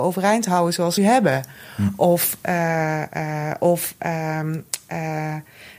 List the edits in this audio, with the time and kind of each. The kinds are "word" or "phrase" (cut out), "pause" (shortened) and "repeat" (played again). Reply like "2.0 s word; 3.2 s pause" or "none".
1.0 s phrase